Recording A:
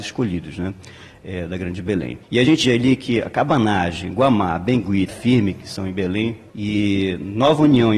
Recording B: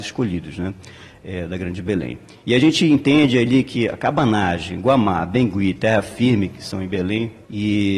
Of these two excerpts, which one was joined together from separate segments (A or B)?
A